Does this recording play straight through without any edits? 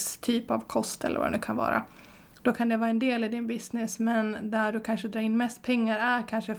yes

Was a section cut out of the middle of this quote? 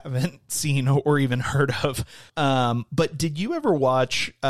yes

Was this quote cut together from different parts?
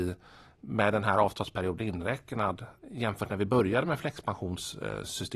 no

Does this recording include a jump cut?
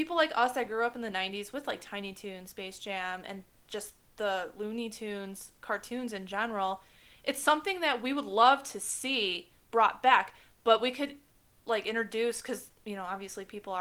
no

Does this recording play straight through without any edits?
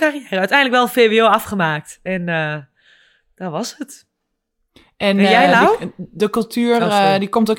yes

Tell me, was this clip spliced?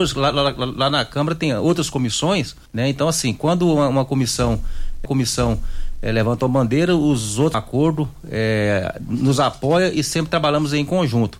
yes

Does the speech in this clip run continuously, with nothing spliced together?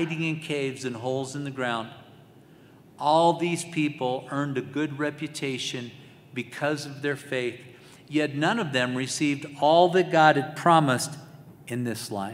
yes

